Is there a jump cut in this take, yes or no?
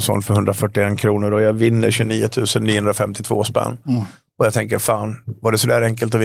no